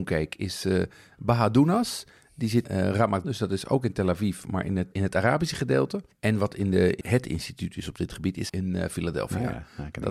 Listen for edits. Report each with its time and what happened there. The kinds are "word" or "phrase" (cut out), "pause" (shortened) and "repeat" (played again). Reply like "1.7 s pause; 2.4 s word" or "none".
2.6 s word; 3.2 s word; 7.0 s word; 8.5 s word